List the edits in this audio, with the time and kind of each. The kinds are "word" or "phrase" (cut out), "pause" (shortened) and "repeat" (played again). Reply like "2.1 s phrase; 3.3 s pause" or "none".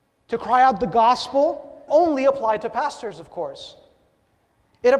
1.9 s word